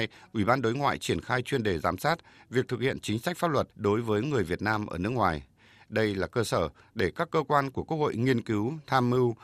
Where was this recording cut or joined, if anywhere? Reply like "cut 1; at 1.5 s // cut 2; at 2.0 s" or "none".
cut 1; at 3.7 s